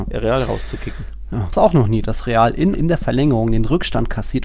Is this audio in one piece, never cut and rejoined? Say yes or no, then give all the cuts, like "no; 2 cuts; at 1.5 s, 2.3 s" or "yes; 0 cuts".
no; 2 cuts; at 1.5 s, 2.7 s